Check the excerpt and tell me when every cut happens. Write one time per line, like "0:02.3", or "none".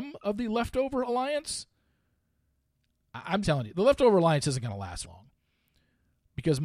0:03.4
0:05.0